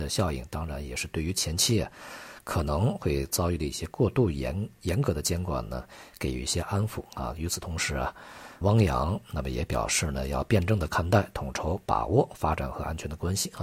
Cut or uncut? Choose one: cut